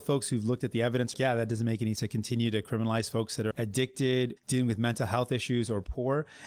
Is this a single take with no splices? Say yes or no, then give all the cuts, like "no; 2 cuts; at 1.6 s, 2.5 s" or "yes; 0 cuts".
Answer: no; 4 cuts; at 1.1 s, 2.0 s, 3.5 s, 4.4 s